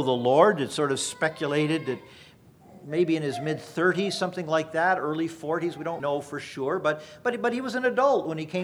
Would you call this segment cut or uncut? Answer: cut